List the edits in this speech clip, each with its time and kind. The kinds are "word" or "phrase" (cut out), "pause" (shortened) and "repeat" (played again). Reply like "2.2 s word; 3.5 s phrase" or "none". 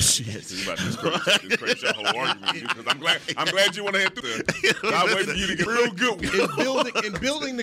4.2 s phrase; 5.7 s word